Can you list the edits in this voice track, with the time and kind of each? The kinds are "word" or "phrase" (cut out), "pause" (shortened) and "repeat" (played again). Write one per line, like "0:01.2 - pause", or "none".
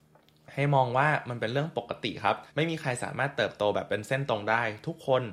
0:02.5 - pause